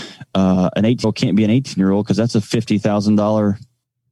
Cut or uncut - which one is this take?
cut